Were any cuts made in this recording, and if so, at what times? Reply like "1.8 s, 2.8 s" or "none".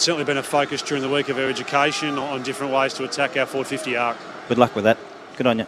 none